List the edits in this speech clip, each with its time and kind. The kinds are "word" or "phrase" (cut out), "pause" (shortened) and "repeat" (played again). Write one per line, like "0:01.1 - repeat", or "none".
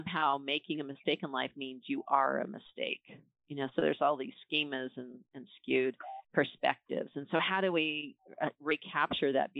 0:06.2 - pause